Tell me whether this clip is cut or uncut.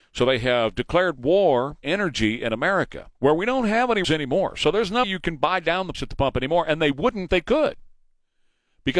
cut